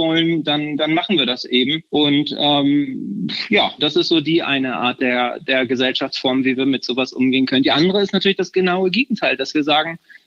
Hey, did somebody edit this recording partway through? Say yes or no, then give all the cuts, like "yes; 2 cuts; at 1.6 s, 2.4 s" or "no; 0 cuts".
yes; 2 cuts; at 1.9 s, 3.8 s